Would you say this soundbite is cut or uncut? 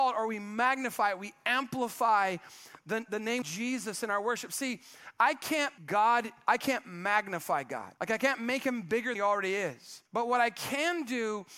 cut